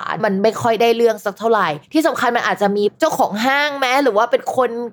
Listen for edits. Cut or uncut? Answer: cut